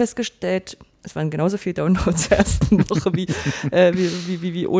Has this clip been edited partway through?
yes; 1 cut; at 2.3 s

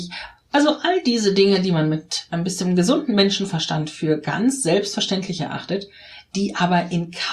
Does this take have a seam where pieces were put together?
no; 0 cuts

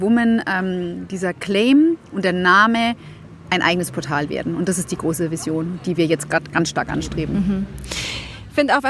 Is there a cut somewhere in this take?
no; 0 cuts

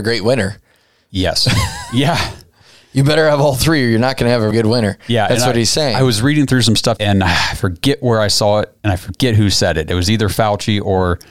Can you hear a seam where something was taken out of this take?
yes; 2 cuts; at 4.5 s, 7.0 s

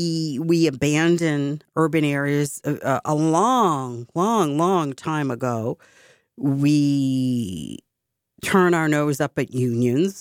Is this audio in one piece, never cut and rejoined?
yes; 0 cuts

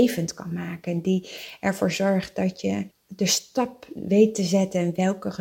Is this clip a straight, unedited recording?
no; 1 cut; at 2.9 s

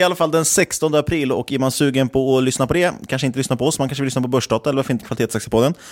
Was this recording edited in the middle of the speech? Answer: no; 0 cuts

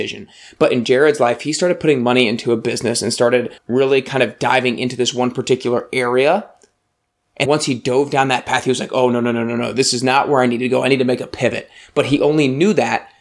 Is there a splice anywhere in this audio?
yes; 2 cuts; at 3.6 s, 7.5 s

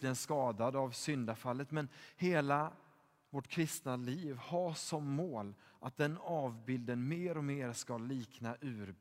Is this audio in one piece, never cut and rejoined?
yes; 0 cuts

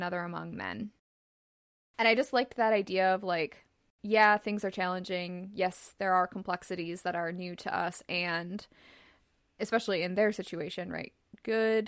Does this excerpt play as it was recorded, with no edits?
yes; 0 cuts

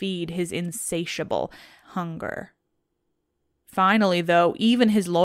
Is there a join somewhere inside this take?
yes; 1 cut; at 1.8 s

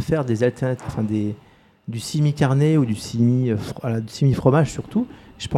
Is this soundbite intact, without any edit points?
yes; 0 cuts

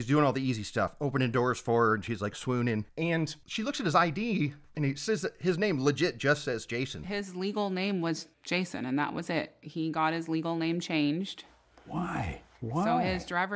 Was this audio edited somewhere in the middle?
yes; 1 cut; at 2.9 s

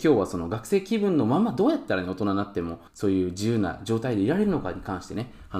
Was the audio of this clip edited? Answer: yes; 1 cut; at 2.9 s

